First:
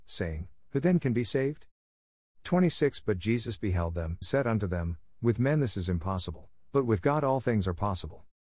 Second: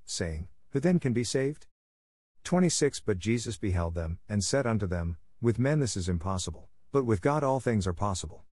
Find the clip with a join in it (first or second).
first